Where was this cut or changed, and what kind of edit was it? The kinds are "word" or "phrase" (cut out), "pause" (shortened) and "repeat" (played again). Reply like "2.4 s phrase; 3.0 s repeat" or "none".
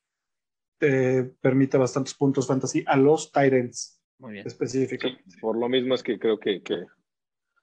4.0 s pause